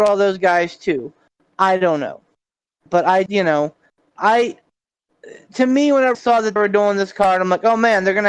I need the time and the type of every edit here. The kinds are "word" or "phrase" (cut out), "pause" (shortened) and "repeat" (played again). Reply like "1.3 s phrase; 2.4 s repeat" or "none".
2.9 s word; 3.3 s word; 6.1 s word; 6.6 s word